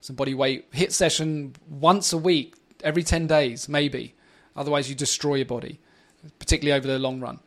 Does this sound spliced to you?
no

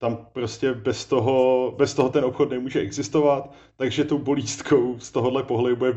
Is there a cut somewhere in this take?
no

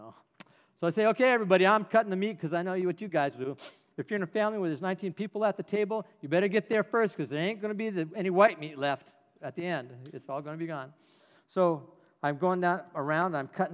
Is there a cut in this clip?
no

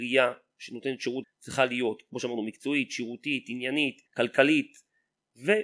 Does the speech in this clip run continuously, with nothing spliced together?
no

